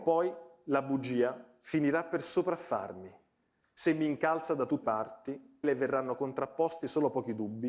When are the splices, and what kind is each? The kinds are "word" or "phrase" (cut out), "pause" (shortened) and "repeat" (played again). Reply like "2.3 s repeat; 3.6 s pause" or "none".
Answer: 4.8 s word; 5.6 s phrase